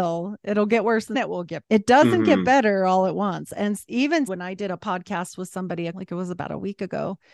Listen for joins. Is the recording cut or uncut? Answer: cut